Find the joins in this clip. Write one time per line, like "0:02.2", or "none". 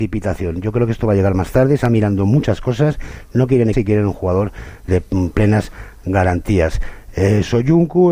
0:01.8
0:03.7
0:04.9